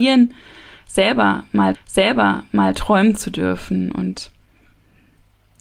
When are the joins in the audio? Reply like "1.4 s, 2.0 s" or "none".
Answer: 1.7 s